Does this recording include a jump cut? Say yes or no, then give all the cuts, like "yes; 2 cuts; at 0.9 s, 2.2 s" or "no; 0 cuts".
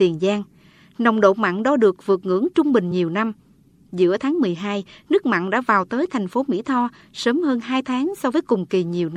no; 0 cuts